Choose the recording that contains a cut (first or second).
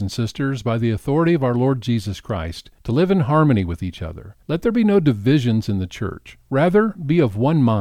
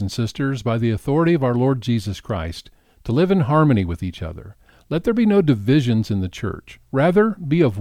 first